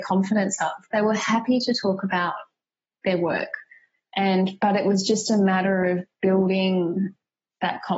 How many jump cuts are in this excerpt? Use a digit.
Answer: 0